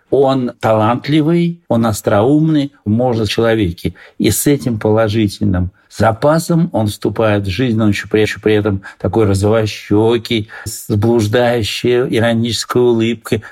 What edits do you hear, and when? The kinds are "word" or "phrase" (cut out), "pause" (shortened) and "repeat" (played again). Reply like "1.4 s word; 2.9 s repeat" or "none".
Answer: 1.6 s pause; 2.8 s phrase; 3.3 s phrase; 8.2 s repeat; 10.7 s word